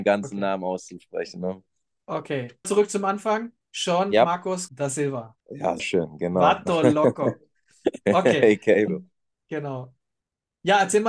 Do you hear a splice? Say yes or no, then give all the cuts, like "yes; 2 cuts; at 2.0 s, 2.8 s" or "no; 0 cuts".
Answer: yes; 5 cuts; at 2.6 s, 4.7 s, 5.4 s, 5.8 s, 8.9 s